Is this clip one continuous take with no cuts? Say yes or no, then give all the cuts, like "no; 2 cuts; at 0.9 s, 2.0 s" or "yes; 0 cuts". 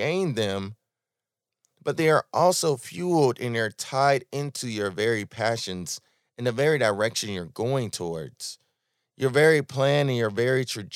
yes; 0 cuts